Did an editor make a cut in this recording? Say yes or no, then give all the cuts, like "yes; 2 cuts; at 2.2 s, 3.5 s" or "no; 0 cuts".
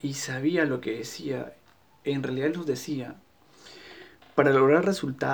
no; 0 cuts